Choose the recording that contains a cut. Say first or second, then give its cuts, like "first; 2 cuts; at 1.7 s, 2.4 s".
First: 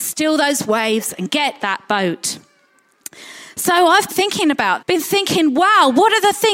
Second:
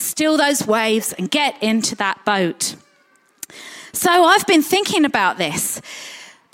first; 3 cuts; at 1.6 s, 4.1 s, 4.8 s